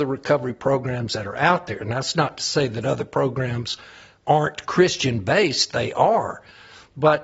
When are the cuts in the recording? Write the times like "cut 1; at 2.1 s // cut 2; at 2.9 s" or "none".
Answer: none